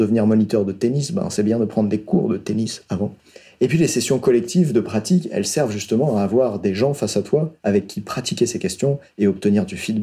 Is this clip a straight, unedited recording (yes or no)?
yes